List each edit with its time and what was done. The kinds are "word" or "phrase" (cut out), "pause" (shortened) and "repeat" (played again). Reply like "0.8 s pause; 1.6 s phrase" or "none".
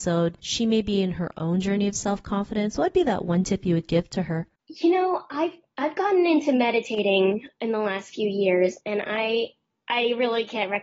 4.6 s pause